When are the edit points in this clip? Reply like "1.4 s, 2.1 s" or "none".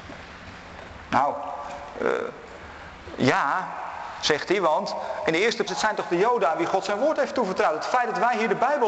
5.7 s